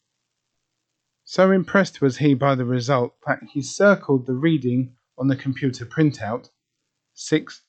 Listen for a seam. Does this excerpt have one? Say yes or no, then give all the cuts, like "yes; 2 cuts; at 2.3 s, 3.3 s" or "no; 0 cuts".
no; 0 cuts